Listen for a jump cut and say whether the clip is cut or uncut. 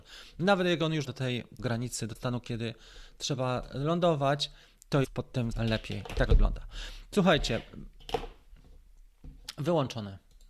cut